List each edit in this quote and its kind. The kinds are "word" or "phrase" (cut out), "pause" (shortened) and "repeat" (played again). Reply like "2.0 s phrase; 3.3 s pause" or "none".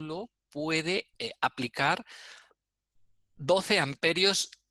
1.1 s pause